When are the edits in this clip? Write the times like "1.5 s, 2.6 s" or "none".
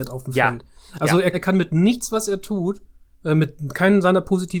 1.3 s, 3.1 s